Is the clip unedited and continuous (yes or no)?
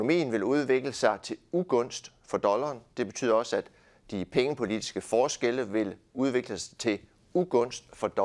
yes